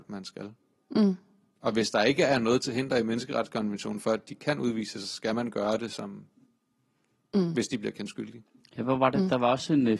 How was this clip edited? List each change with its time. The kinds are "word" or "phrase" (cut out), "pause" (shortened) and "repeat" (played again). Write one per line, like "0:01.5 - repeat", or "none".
none